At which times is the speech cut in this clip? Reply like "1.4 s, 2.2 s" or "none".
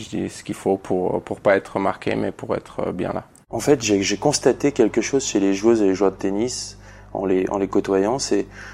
none